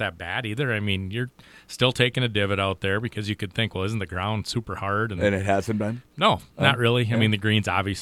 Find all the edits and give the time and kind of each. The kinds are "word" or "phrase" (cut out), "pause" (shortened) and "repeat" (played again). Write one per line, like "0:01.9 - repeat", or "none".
none